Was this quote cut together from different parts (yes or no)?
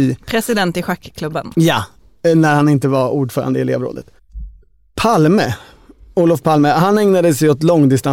no